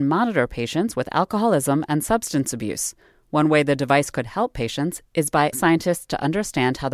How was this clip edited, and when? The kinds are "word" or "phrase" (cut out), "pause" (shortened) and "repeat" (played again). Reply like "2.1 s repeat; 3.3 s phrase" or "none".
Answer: 5.5 s word